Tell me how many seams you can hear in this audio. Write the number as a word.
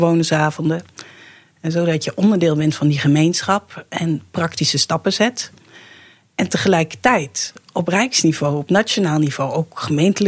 zero